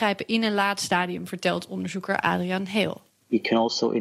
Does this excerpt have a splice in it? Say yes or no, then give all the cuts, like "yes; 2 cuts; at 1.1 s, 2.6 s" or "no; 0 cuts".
no; 0 cuts